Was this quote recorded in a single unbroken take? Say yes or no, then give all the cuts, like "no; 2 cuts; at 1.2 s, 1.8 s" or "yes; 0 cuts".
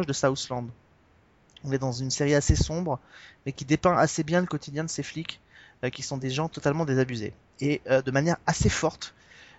yes; 0 cuts